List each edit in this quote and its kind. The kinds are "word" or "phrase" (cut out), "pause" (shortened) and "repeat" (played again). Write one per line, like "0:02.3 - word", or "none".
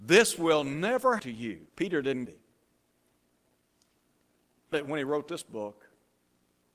0:01.2 - word
0:01.7 - pause
0:02.3 - phrase
0:04.7 - word